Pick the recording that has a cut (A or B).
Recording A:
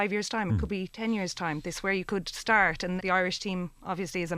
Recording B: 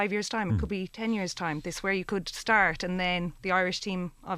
A